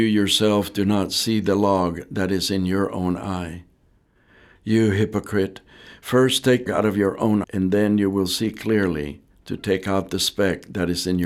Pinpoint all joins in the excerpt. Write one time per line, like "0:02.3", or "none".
0:06.7
0:07.4